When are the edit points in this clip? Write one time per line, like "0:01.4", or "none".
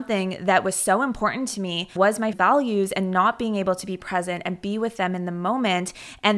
0:02.3